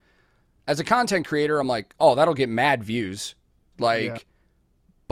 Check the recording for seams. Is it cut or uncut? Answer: uncut